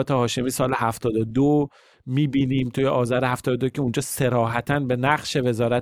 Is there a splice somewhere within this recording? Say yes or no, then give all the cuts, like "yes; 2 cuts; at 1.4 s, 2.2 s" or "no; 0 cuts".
no; 0 cuts